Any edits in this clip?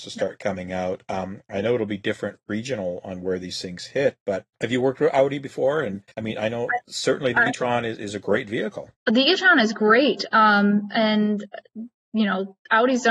yes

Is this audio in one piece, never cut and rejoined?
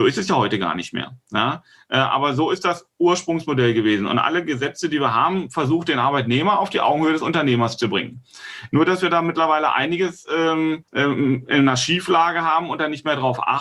no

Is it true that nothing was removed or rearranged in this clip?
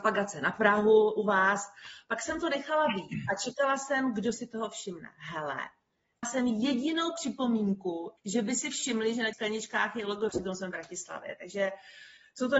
no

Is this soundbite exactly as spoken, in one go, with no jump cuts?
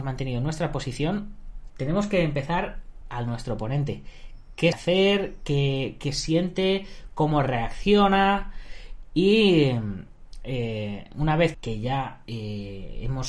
no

